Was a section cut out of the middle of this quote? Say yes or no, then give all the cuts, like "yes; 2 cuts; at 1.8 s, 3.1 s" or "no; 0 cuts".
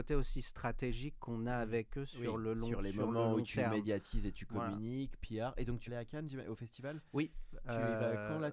yes; 1 cut; at 5.9 s